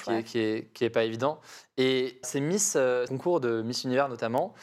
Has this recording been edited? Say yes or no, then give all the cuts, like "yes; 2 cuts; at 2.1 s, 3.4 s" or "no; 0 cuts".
yes; 2 cuts; at 2.2 s, 3.1 s